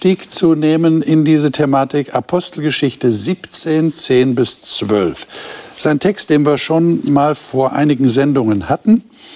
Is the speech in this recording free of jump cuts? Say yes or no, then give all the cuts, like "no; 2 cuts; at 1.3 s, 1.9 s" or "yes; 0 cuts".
yes; 0 cuts